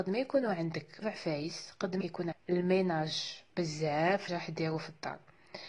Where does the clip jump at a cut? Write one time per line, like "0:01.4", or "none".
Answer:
0:01.0
0:02.0
0:02.3
0:04.3